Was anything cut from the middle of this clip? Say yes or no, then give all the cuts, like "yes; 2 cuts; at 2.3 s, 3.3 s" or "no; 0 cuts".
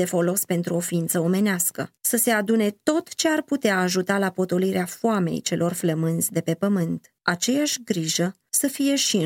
yes; 2 cuts; at 2.0 s, 7.2 s